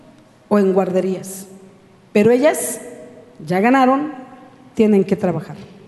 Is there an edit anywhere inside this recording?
no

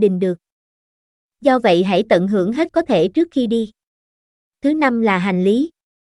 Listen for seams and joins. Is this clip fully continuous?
no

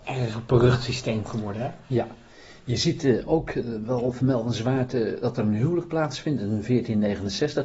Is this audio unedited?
yes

